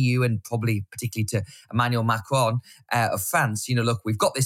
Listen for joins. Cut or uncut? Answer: uncut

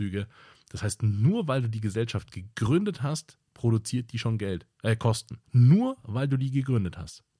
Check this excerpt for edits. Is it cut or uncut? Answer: cut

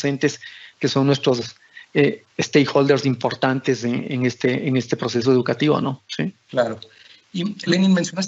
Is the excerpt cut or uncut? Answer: uncut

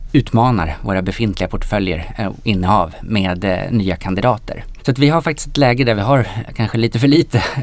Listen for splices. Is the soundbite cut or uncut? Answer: uncut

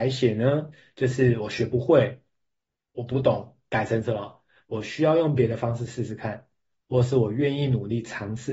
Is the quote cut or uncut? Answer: uncut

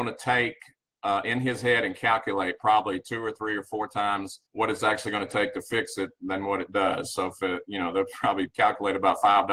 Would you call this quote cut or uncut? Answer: cut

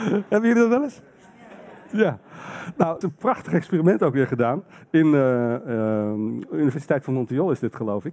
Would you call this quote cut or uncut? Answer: cut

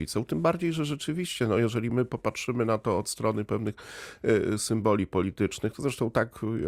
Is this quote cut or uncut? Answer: uncut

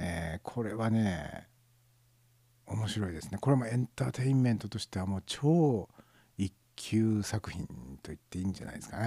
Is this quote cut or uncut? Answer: uncut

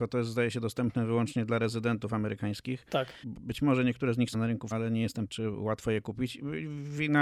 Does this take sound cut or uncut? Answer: cut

